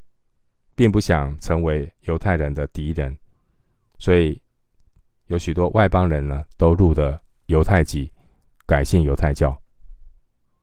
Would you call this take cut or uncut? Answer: uncut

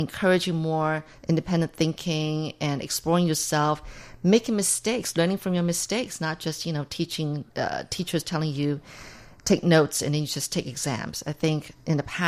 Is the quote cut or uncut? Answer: uncut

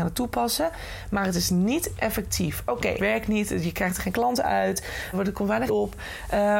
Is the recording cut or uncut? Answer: cut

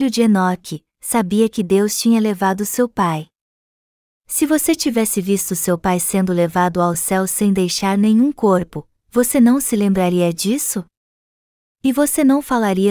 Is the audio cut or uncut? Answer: uncut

